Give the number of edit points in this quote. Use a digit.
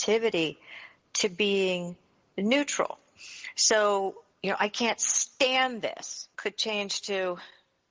2